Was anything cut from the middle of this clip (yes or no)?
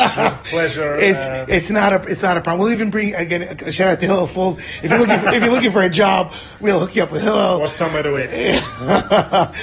no